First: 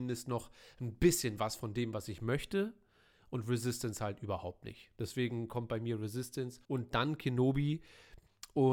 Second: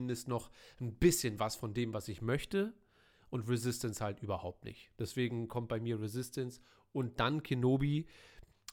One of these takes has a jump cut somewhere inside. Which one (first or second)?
first